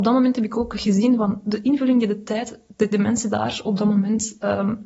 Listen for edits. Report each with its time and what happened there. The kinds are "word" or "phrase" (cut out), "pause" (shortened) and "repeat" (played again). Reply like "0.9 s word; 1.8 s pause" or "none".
none